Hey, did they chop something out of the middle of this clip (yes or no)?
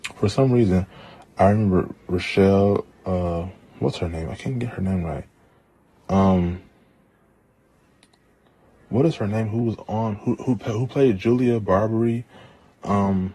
no